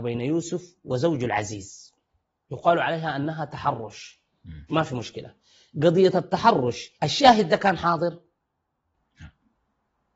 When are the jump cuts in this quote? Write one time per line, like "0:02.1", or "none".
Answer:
0:02.5
0:04.7
0:07.0